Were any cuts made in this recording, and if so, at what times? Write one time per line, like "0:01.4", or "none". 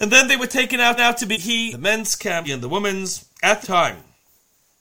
0:01.0
0:01.3
0:01.7
0:02.4
0:03.6